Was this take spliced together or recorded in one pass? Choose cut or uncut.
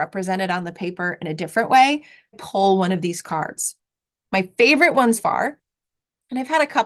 cut